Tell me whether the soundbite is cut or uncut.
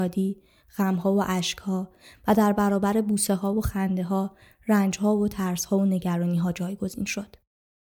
uncut